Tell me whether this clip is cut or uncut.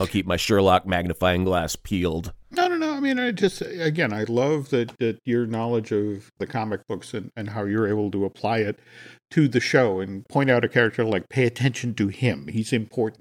uncut